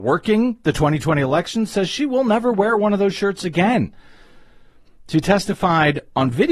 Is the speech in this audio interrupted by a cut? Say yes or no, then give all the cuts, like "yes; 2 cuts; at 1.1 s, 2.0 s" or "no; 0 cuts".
no; 0 cuts